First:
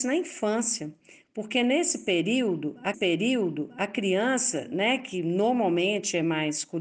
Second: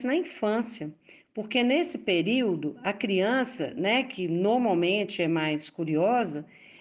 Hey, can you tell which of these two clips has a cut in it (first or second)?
first